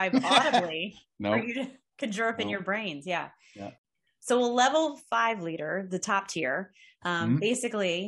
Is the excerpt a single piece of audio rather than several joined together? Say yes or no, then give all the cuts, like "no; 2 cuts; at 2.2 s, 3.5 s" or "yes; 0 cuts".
yes; 0 cuts